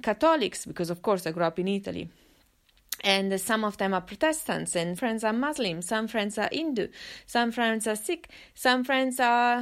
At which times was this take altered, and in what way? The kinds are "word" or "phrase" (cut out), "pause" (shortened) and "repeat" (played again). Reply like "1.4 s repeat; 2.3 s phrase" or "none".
5.0 s word